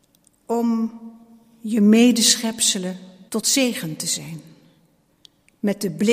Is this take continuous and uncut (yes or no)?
no